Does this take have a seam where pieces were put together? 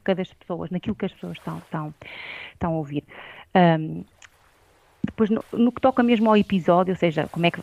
yes; 1 cut; at 5.4 s

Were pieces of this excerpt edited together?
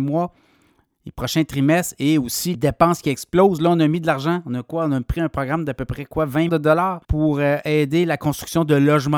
yes; 3 cuts; at 2.5 s, 6.5 s, 7.0 s

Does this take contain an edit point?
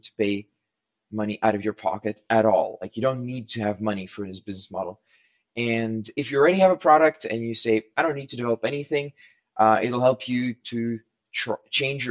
no; 0 cuts

